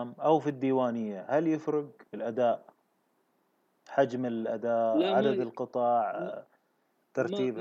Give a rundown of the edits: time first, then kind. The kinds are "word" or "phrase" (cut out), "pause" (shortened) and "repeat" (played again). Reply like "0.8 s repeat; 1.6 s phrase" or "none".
2.1 s pause